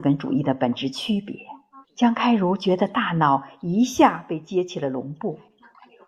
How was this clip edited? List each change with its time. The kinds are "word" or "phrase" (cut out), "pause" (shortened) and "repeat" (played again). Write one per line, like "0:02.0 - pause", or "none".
0:01.8 - pause